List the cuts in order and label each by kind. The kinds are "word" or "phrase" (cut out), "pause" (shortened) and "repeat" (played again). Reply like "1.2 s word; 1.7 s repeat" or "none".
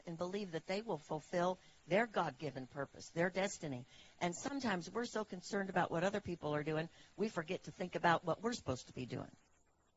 none

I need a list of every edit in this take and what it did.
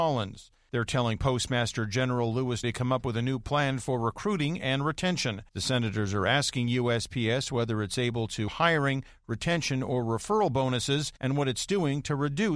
2.6 s word; 5.5 s pause; 8.5 s word; 11.2 s pause

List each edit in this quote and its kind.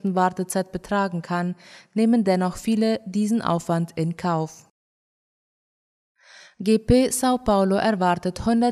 none

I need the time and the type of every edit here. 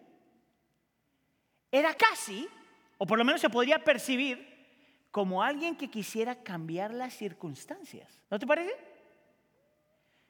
2.0 s word; 8.2 s pause

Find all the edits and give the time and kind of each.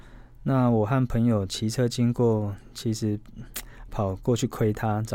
3.9 s word

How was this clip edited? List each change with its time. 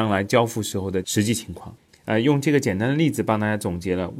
none

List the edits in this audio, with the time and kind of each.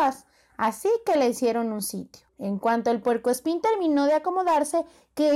2.3 s pause

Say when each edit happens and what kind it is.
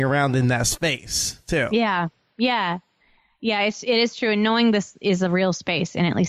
none

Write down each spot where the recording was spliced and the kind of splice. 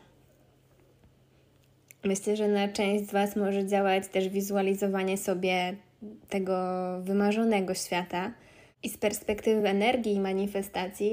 none

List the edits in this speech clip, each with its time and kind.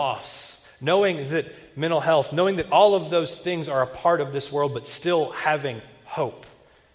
none

